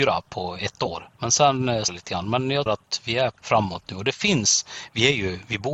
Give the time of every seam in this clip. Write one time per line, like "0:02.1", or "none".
0:01.1
0:01.9
0:02.7
0:03.4